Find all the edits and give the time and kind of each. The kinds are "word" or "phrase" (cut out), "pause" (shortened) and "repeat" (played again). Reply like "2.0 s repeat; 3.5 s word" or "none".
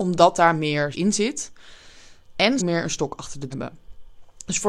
0.9 s word; 2.6 s phrase; 3.5 s word